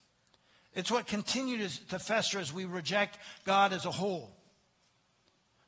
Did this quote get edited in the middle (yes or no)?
no